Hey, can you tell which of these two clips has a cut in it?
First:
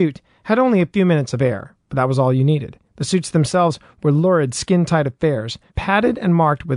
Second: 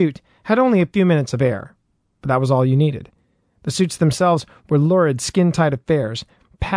first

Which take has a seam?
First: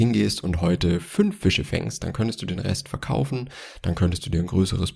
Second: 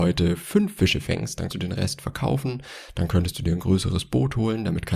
second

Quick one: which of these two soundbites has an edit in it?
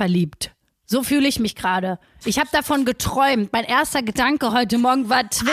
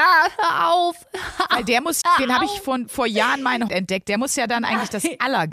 second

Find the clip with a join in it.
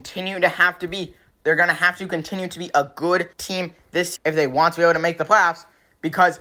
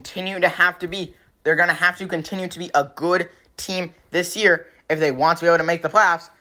first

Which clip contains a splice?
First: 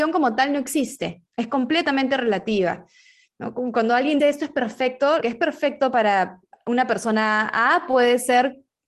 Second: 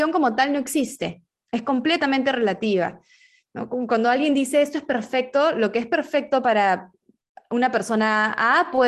first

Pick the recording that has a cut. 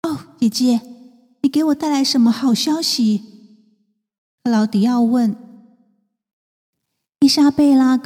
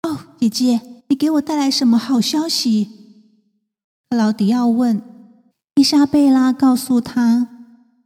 second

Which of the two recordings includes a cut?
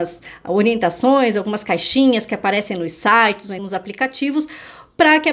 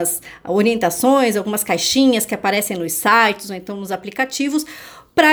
first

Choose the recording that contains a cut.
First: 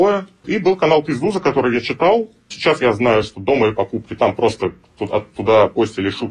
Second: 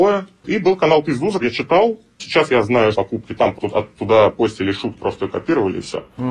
second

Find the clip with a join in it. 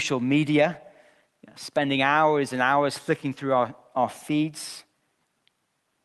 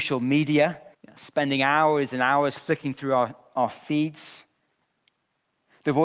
second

